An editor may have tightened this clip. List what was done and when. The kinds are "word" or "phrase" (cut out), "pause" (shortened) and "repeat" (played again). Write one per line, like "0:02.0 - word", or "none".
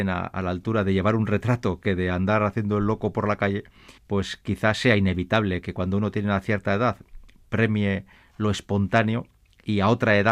0:04.0 - pause